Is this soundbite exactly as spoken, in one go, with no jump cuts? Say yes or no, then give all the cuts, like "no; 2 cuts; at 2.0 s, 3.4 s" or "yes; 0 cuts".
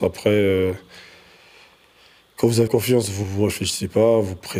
no; 2 cuts; at 2.7 s, 3.2 s